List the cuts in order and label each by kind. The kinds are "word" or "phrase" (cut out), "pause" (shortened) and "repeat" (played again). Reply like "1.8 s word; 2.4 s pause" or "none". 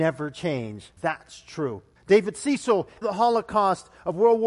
1.0 s pause; 2.0 s pause; 3.0 s word